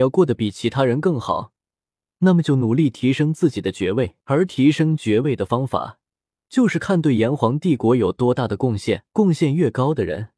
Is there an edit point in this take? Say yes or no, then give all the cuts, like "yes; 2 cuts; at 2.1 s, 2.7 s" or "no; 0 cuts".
yes; 2 cuts; at 4.2 s, 9.1 s